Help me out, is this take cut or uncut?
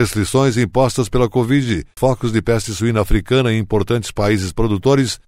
cut